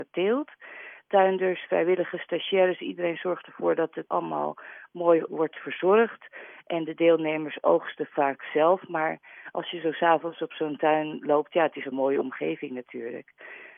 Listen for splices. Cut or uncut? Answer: cut